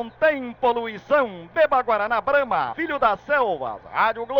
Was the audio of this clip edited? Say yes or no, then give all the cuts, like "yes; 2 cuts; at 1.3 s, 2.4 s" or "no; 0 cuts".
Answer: yes; 1 cut; at 2.7 s